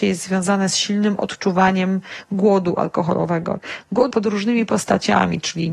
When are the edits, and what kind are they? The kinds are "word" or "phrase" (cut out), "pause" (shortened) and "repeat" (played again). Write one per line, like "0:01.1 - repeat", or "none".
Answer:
0:04.1 - word